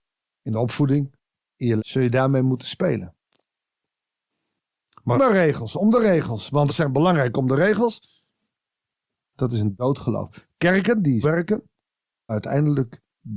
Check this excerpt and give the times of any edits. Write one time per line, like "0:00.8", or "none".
0:01.8
0:05.2
0:06.7
0:11.2
0:12.3